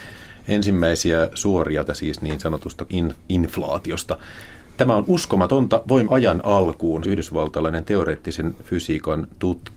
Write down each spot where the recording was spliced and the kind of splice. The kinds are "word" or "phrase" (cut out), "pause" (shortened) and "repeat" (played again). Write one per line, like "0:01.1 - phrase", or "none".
0:01.9 - word
0:02.9 - word
0:03.2 - pause
0:06.1 - word
0:07.0 - word

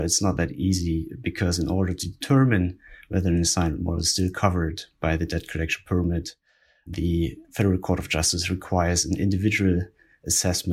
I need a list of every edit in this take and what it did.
0:07.4 - pause

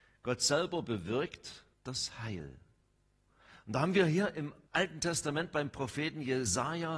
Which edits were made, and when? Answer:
0:01.7 - pause
0:04.7 - pause

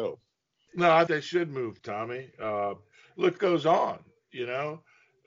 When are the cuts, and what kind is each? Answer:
0:01.1 - word
0:01.8 - word
0:03.4 - word

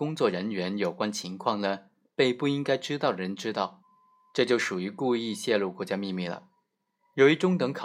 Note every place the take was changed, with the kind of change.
none

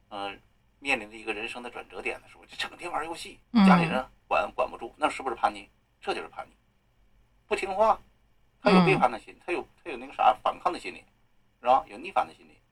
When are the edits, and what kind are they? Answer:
0:03.4 - pause

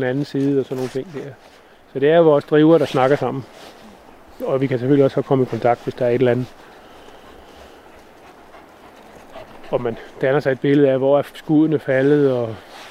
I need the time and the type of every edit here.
none

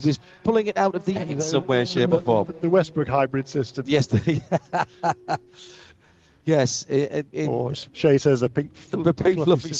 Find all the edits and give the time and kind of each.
0:01.2 - word
0:07.9 - pause

